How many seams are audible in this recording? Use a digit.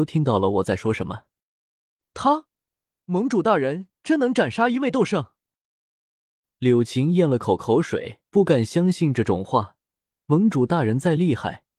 1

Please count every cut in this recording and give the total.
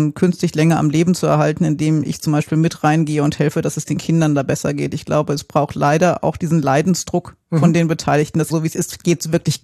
1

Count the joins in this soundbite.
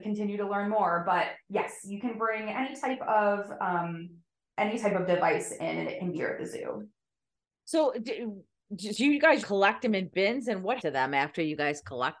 4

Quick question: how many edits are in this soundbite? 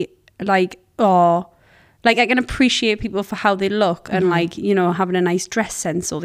0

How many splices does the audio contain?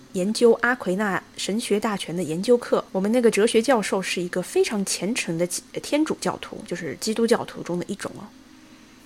1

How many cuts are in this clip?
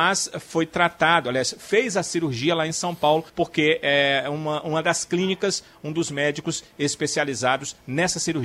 1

